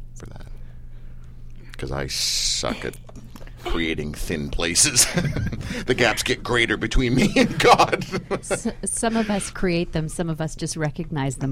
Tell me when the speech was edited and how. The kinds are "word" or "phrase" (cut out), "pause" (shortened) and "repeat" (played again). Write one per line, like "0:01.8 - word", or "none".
none